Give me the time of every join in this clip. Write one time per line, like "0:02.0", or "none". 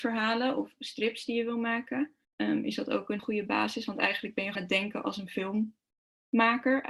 0:02.2
0:03.2
0:04.6